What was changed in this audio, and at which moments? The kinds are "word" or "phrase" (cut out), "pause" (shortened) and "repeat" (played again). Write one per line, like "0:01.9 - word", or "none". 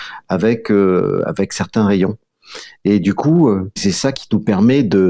0:03.8 - word
0:04.1 - word